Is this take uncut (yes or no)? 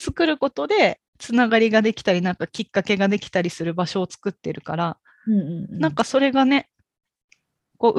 no